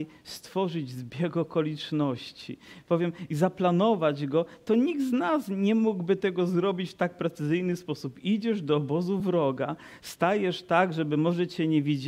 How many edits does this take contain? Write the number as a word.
zero